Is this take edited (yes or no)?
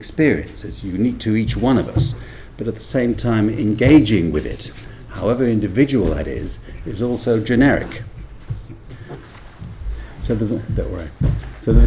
no